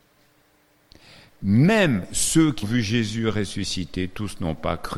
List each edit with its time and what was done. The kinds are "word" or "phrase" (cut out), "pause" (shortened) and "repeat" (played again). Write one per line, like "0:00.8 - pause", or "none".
0:02.6 - word